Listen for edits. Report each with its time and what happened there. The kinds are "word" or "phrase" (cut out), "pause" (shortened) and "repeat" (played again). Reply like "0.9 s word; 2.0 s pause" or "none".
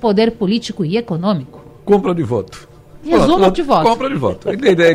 3.5 s word